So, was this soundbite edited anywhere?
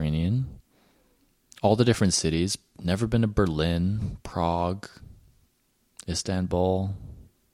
no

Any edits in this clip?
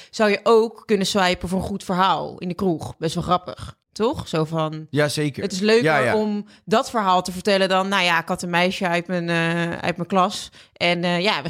yes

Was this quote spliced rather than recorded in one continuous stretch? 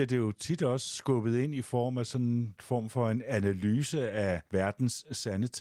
yes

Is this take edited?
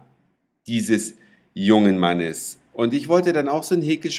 no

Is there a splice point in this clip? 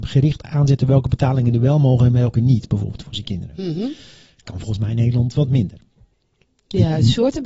no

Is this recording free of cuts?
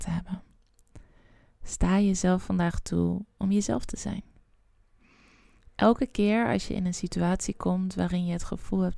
yes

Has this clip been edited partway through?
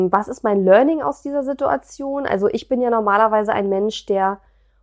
no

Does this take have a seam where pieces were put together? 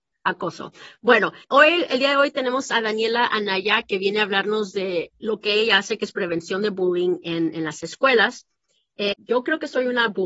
yes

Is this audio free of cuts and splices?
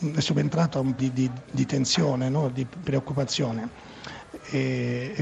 no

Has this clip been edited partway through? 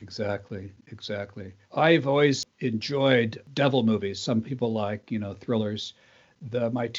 yes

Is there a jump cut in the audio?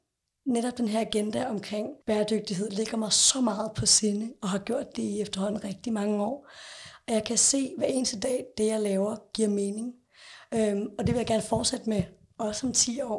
yes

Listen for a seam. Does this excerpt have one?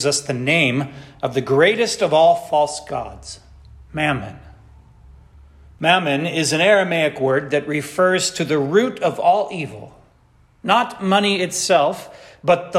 no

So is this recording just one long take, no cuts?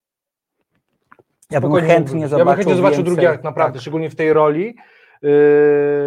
yes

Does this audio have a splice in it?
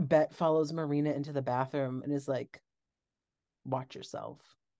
no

